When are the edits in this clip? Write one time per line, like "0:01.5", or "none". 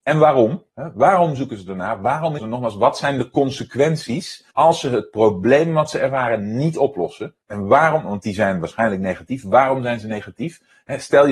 0:02.4
0:04.5
0:07.4